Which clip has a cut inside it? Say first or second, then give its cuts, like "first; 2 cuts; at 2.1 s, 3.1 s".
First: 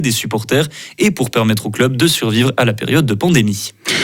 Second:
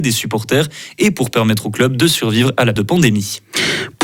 second; 1 cut; at 2.8 s